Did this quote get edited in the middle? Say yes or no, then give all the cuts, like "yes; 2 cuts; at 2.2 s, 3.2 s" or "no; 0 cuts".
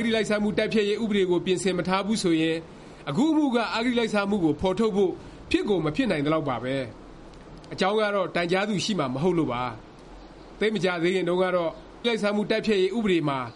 yes; 1 cut; at 12.0 s